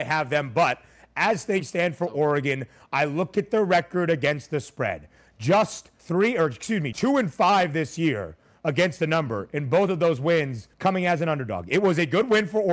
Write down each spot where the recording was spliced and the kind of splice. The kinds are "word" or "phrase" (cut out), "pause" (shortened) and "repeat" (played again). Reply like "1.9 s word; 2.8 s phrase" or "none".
6.0 s pause; 6.9 s word; 10.7 s pause